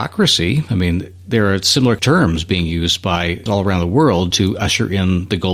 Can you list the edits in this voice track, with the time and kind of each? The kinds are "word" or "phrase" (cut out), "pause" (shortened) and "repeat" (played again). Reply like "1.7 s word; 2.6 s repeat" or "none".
3.5 s word